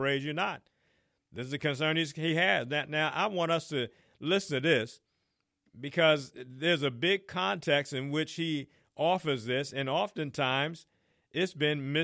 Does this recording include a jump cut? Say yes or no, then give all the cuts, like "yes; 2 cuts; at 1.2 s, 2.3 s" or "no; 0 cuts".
no; 0 cuts